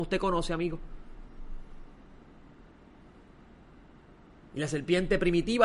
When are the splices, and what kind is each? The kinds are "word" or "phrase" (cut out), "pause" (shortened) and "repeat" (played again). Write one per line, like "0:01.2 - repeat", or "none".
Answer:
none

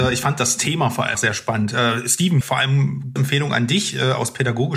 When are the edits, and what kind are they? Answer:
0:01.1 - word
0:02.4 - word
0:03.2 - word

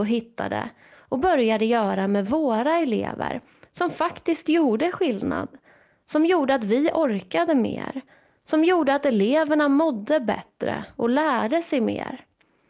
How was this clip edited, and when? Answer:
none

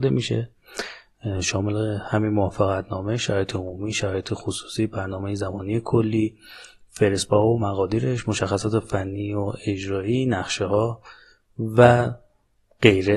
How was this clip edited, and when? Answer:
none

